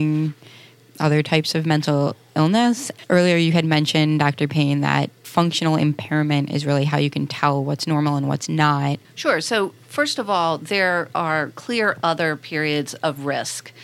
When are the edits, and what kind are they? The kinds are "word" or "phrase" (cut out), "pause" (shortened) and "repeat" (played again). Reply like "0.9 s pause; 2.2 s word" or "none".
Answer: 9.0 s pause